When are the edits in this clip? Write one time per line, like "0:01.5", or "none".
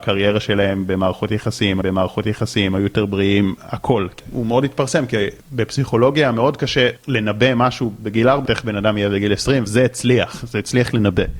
0:01.8
0:07.0
0:08.5
0:09.7